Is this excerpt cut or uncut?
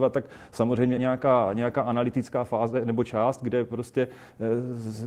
cut